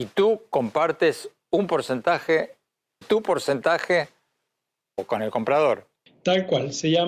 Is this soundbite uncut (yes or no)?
no